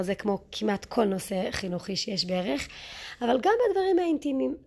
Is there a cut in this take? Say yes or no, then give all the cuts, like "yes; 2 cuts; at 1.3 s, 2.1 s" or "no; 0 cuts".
no; 0 cuts